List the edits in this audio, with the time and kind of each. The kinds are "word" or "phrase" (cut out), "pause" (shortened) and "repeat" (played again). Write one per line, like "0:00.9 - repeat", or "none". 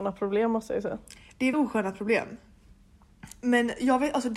0:01.5 - word